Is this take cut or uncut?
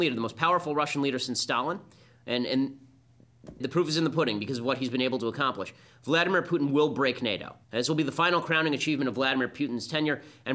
cut